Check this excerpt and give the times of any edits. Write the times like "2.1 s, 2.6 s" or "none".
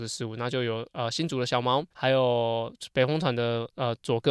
1.9 s